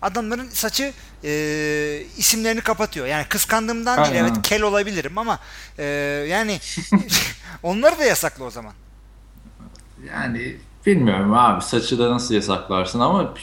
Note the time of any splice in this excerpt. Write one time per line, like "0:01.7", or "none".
none